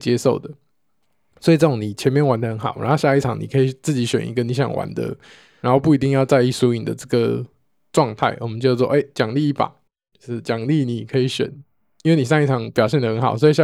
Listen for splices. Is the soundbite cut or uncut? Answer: uncut